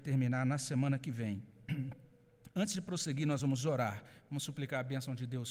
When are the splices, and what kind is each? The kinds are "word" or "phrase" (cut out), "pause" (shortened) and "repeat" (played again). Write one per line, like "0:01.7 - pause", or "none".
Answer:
none